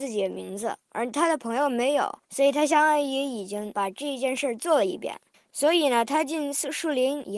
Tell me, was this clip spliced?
yes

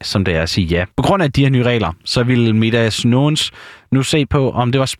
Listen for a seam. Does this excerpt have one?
yes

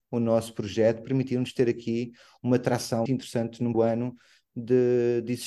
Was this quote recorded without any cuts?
no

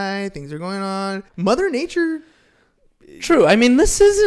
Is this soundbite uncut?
no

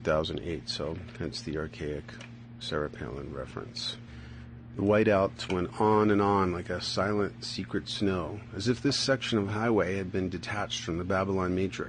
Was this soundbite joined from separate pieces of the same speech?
no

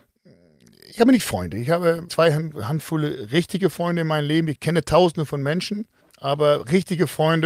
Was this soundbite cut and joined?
yes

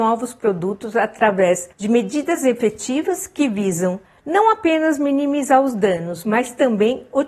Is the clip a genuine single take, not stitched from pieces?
no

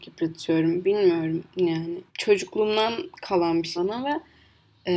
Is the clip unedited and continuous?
no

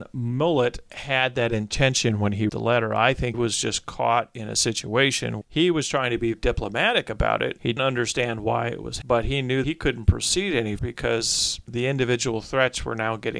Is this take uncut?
no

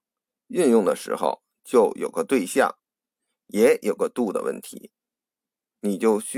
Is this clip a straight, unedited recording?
yes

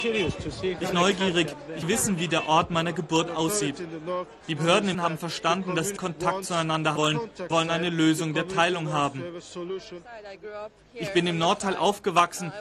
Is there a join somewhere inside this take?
yes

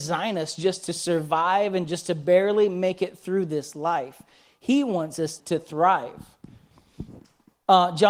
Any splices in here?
yes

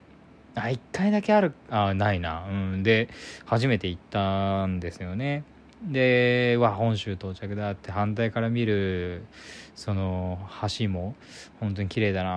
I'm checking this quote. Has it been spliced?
no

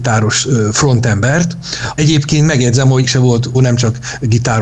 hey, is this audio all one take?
no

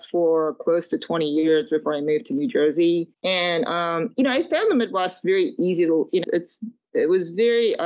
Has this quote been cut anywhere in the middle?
yes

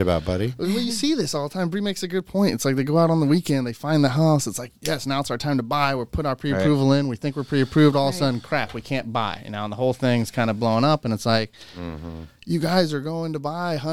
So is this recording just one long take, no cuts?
yes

